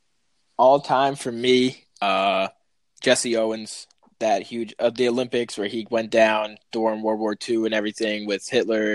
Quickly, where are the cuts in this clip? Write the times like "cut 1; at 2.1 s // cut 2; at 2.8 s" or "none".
none